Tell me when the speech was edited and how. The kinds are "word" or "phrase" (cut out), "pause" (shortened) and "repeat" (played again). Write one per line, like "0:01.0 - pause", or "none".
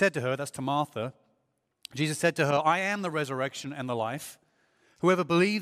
none